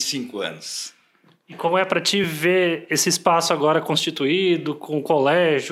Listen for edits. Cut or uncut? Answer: uncut